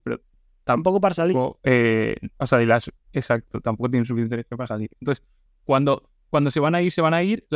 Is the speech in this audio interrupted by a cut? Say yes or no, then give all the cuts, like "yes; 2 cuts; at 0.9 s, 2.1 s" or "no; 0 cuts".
no; 0 cuts